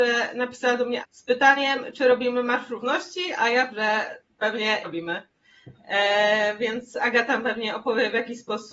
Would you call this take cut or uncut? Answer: cut